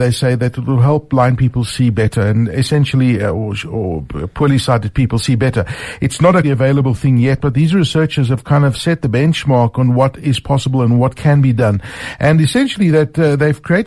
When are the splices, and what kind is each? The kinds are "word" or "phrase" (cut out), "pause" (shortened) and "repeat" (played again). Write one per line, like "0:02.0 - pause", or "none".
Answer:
0:06.4 - word